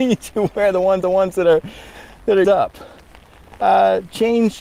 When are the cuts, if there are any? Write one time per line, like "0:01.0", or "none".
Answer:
0:01.0
0:02.4